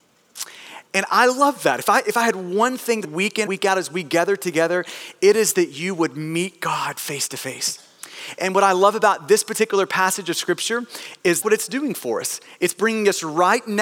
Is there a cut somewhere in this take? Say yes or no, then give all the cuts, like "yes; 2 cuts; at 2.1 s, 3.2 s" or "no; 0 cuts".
yes; 3 cuts; at 3.0 s, 3.5 s, 11.4 s